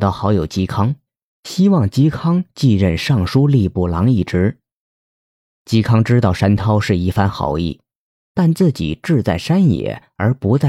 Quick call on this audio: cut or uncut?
uncut